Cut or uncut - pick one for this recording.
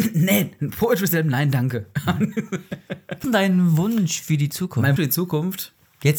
cut